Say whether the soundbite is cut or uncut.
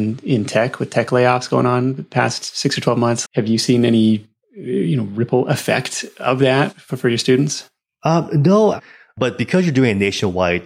cut